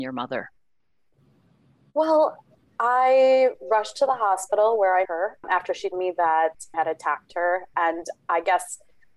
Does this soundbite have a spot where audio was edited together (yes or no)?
yes